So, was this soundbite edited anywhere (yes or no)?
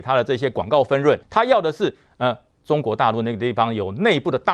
yes